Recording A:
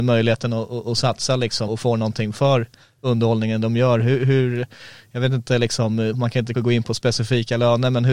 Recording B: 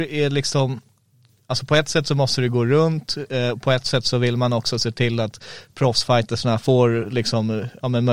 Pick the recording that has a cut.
A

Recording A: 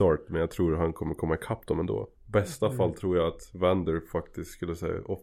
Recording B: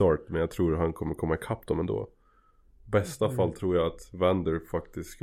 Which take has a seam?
A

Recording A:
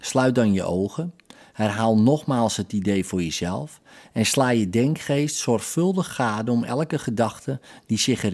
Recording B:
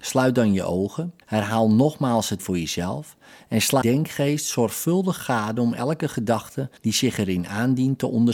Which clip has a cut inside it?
B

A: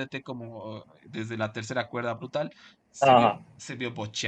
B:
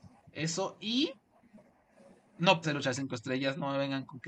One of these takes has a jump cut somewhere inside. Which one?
B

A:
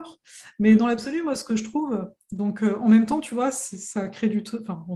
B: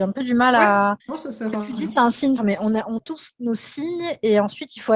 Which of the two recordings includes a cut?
B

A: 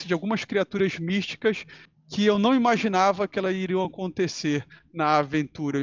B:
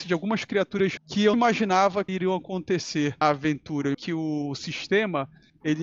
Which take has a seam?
B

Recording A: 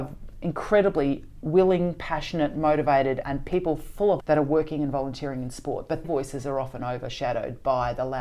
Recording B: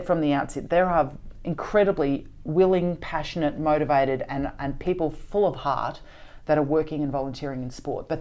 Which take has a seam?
A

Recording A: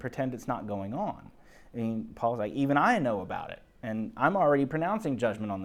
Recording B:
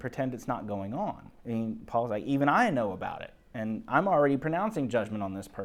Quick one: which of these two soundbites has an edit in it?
B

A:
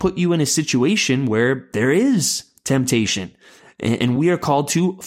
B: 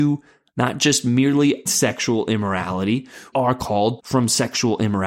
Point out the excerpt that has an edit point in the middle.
B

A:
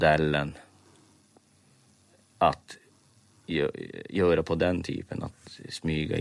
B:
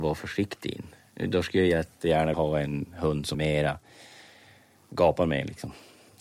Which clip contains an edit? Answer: B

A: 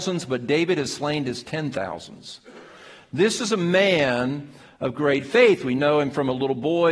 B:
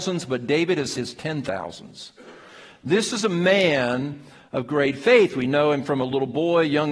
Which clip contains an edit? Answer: B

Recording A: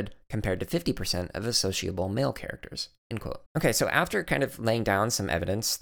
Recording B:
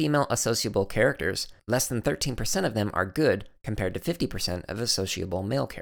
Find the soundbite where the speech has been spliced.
A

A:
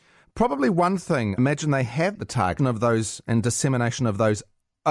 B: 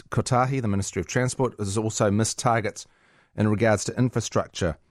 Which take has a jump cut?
A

